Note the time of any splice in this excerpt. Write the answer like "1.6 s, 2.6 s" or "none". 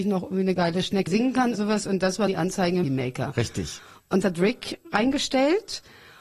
1.1 s, 1.5 s, 2.3 s, 2.8 s, 4.2 s